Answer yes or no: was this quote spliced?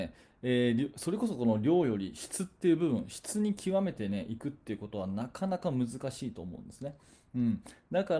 no